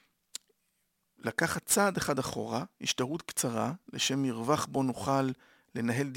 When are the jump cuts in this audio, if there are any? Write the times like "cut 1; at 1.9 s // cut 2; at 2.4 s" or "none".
none